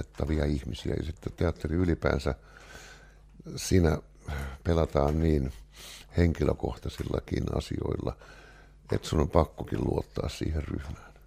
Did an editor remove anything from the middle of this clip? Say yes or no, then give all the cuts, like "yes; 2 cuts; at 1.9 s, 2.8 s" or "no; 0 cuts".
no; 0 cuts